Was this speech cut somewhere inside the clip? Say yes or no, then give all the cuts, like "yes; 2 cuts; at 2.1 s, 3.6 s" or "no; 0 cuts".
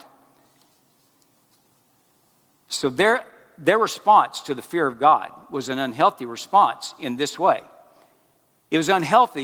no; 0 cuts